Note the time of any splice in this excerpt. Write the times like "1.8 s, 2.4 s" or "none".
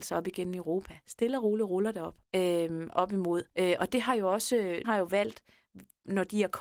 2.2 s, 3.5 s, 4.8 s